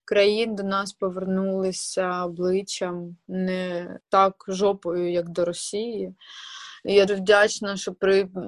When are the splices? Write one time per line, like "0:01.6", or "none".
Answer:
0:04.0
0:07.1